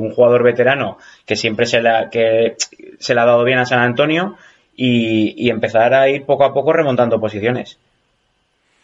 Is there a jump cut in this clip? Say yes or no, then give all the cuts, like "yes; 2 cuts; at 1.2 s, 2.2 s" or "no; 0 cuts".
no; 0 cuts